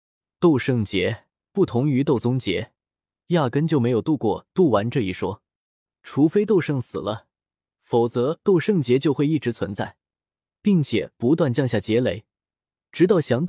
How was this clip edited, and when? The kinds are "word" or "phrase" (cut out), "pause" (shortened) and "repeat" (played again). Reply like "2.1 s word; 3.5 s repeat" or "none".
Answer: none